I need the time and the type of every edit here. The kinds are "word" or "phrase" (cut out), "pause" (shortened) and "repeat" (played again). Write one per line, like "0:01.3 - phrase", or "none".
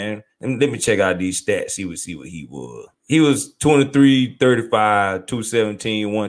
0:02.9 - pause